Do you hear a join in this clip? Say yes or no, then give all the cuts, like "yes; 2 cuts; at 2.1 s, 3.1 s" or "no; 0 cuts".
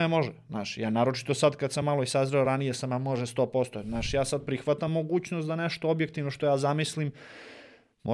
no; 0 cuts